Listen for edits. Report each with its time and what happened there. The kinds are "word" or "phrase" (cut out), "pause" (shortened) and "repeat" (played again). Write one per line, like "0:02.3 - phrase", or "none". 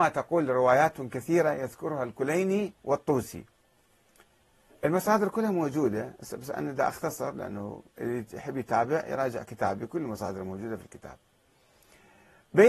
0:02.8 - pause
0:07.9 - pause